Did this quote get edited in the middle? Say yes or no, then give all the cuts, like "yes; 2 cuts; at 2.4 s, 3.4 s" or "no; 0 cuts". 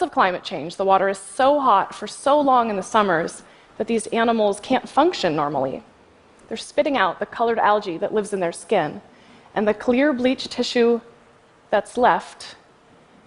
no; 0 cuts